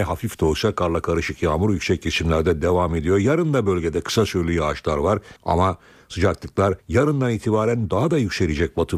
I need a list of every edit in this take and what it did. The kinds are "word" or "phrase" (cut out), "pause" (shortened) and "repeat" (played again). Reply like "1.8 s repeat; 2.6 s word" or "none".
5.4 s pause; 6.8 s pause